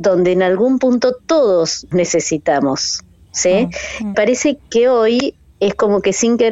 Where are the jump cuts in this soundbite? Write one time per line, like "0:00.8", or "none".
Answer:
0:01.9
0:04.1
0:04.6

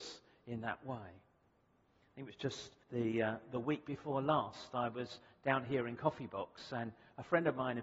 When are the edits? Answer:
0:02.8

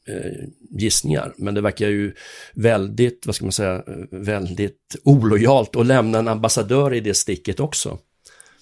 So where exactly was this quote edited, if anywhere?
none

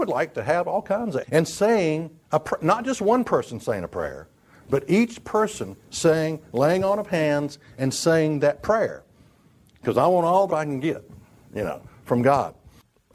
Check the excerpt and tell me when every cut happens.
0:01.2
0:02.2
0:10.5

